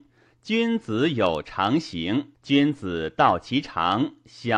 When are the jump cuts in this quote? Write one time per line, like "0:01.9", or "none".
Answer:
0:02.3